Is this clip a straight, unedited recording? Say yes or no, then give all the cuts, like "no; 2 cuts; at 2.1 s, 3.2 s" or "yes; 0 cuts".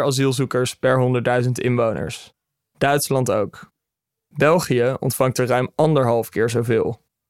yes; 0 cuts